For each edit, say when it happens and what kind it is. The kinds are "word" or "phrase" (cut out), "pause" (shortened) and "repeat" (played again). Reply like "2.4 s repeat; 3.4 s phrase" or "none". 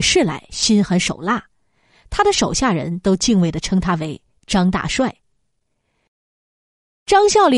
none